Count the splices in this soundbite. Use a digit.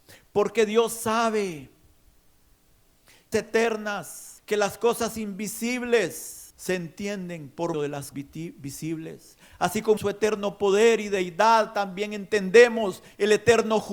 6